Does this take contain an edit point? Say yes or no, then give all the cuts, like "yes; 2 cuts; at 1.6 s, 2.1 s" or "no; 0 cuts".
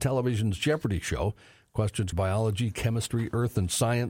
yes; 1 cut; at 2.1 s